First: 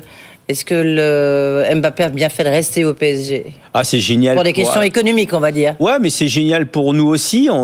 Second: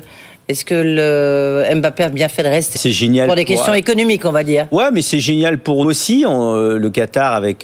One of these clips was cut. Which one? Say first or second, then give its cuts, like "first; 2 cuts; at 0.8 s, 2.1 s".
second; 2 cuts; at 2.7 s, 5.8 s